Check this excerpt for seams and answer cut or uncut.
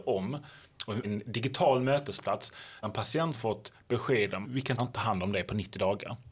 cut